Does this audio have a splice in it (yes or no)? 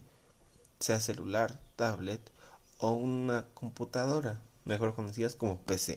no